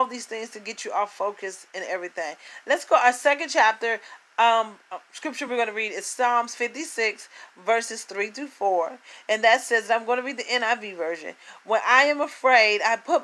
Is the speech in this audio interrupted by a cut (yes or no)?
no